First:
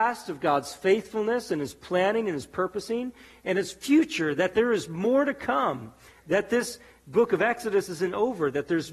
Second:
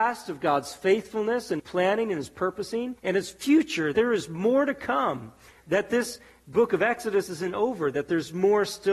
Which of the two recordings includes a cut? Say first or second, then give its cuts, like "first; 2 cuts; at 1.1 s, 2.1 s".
second; 3 cuts; at 1.6 s, 3.0 s, 3.9 s